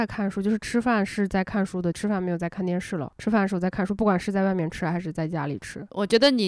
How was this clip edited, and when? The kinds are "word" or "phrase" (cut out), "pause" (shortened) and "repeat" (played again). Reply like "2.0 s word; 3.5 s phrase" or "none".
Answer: 1.9 s phrase